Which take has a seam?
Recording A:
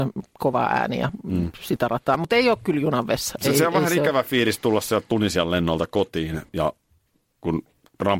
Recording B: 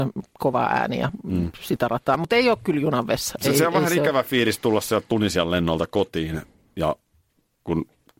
A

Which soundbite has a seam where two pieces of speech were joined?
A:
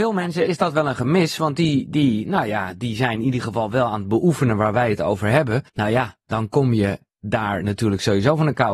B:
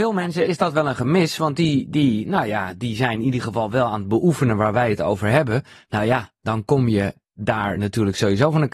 A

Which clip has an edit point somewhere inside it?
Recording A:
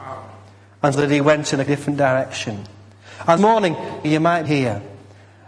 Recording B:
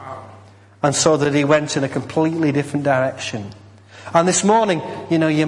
A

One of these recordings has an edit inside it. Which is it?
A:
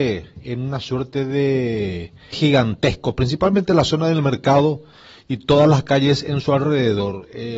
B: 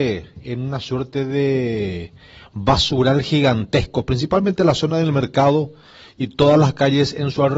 A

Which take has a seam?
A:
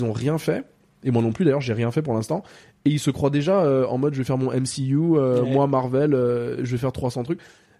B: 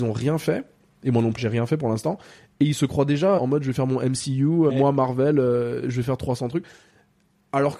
B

